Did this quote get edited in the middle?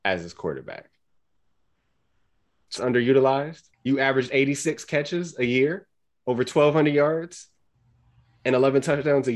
yes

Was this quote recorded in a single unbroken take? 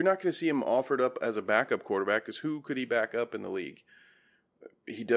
yes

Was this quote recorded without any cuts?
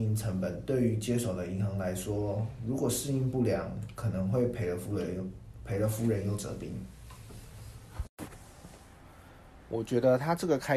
yes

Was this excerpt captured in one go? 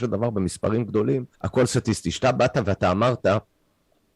no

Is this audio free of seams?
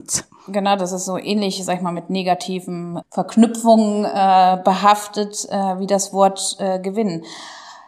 yes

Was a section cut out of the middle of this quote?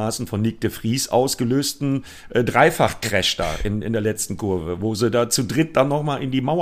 no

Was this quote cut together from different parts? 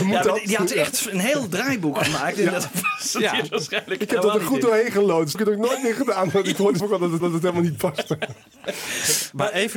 yes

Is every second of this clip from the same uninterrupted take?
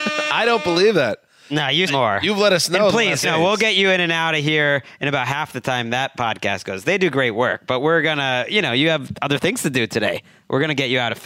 no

